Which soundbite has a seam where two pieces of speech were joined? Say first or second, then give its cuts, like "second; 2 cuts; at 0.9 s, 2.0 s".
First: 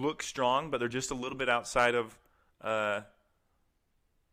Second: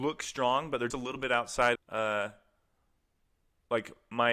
second; 2 cuts; at 0.9 s, 1.8 s